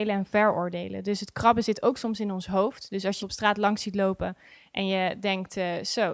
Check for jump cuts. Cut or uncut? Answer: cut